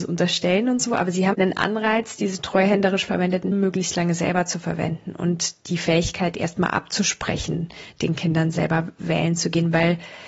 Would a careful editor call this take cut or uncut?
cut